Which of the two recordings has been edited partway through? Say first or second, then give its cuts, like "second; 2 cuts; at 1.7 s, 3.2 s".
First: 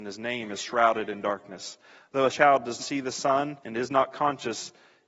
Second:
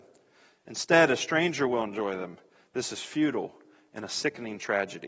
first; 3 cuts; at 2.3 s, 2.8 s, 3.6 s